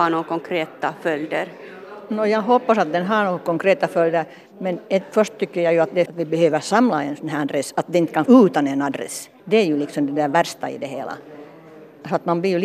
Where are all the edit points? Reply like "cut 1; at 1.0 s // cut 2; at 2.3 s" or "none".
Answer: cut 1; at 6.1 s // cut 2; at 8.3 s // cut 3; at 9.4 s